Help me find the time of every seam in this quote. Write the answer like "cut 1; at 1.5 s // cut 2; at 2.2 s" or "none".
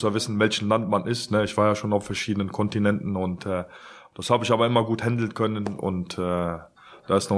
none